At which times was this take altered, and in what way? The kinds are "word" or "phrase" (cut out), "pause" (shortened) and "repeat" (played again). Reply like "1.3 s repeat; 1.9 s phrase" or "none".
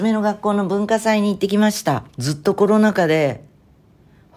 2.1 s pause